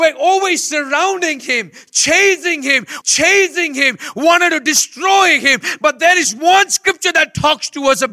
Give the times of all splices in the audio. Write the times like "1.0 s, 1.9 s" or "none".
3.0 s